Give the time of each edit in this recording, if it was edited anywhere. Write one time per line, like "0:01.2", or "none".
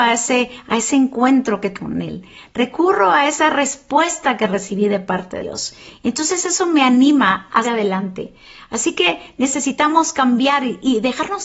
0:01.7
0:05.4
0:07.6